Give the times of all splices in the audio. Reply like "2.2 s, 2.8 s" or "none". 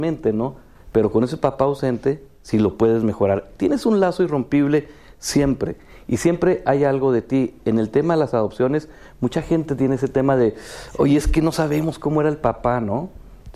none

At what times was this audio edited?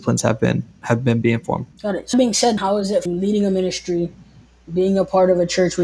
1.7 s, 2.1 s, 2.6 s, 3.1 s

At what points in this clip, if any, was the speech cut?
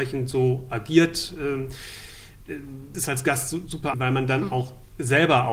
2.9 s, 3.9 s

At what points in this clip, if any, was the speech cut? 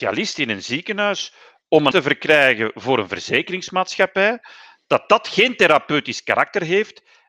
1.9 s

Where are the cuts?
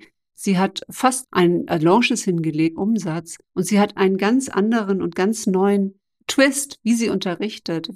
1.2 s, 2.8 s, 3.4 s

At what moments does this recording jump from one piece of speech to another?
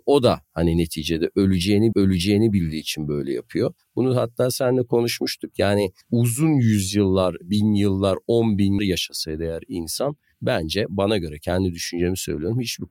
1.9 s, 6.0 s, 8.8 s

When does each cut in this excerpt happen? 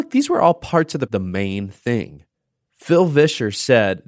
1.1 s

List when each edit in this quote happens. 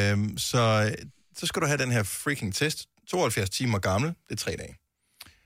none

